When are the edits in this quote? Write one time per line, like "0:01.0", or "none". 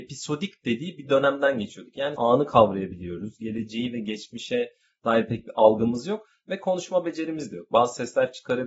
0:02.2